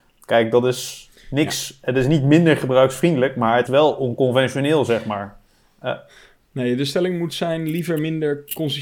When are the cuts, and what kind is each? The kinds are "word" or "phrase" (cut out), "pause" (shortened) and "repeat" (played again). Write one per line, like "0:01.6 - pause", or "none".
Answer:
0:03.7 - word